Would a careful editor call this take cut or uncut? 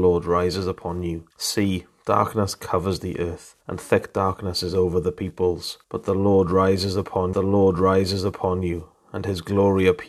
cut